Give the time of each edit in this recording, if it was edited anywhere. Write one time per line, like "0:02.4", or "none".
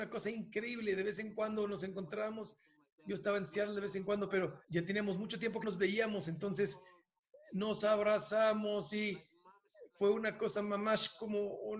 0:04.6
0:05.6